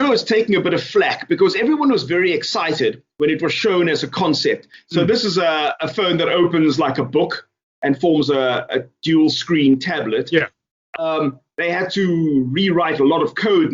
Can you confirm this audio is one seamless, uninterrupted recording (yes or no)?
yes